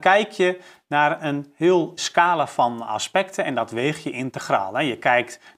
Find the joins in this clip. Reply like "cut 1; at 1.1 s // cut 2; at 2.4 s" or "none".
cut 1; at 2.0 s